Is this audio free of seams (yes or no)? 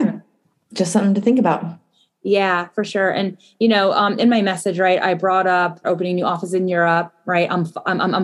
no